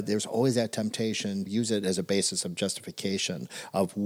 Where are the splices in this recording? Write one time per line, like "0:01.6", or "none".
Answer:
0:01.5